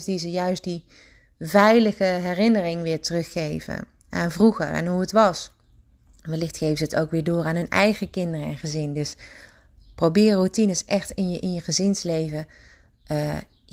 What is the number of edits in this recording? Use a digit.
0